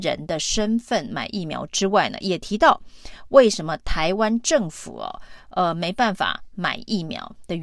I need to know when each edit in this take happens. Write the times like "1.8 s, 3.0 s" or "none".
none

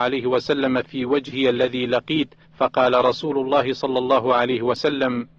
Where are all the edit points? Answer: 2.4 s

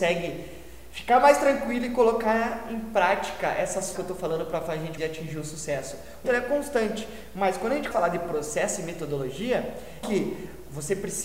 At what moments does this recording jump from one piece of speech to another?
3.9 s, 5.0 s, 6.2 s, 7.9 s, 10.0 s

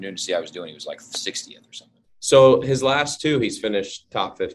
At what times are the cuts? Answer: none

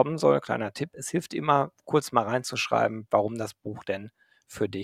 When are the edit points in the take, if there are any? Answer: none

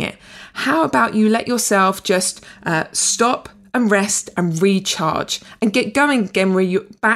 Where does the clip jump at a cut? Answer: none

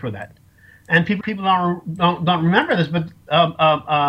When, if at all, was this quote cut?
1.2 s

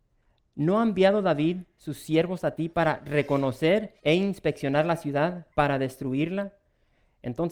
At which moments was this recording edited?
4.0 s, 5.5 s

